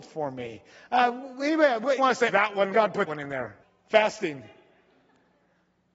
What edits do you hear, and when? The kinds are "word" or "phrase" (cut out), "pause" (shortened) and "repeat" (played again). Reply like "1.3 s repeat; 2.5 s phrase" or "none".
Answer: 2.0 s word; 2.3 s word; 2.7 s phrase; 3.1 s word; 3.6 s pause